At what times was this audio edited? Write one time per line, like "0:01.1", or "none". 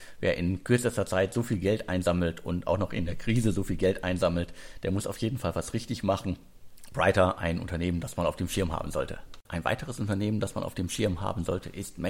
0:09.5